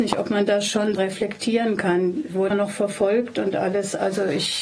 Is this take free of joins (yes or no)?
no